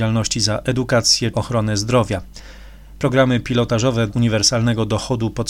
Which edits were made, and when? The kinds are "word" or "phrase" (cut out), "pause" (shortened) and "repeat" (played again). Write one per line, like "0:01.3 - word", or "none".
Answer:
0:01.3 - word
0:04.1 - word